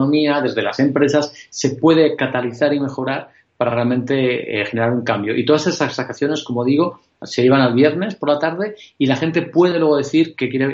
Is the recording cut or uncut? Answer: uncut